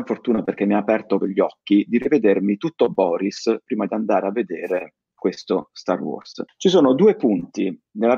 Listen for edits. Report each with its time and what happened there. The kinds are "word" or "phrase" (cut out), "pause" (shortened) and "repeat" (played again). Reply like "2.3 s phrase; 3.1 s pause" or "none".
1.2 s word; 6.5 s pause